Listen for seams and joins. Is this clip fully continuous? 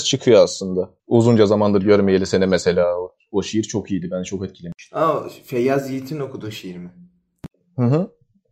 no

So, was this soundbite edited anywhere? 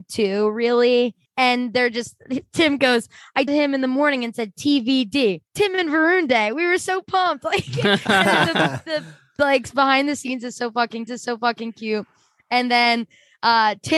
yes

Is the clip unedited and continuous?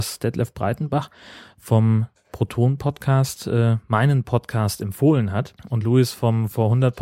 yes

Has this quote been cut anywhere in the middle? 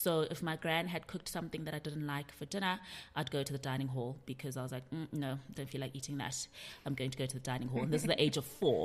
no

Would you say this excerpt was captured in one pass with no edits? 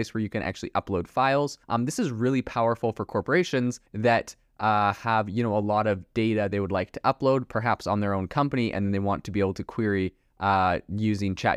no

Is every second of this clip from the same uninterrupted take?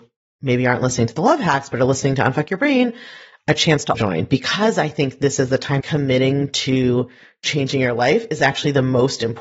no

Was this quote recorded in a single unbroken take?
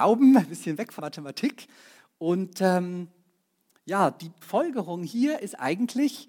no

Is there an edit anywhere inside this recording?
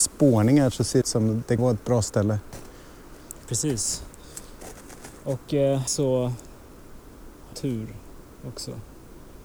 yes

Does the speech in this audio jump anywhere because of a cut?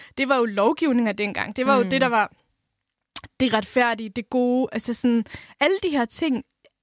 no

